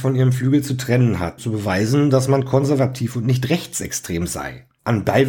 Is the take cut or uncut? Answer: cut